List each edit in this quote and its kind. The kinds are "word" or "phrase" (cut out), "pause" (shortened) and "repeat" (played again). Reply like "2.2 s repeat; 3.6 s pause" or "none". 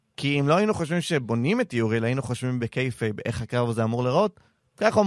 none